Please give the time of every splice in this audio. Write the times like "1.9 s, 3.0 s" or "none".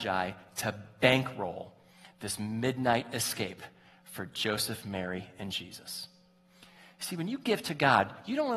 none